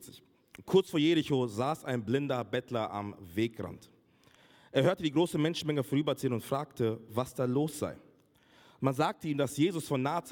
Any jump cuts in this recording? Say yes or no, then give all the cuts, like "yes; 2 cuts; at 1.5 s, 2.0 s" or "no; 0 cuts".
no; 0 cuts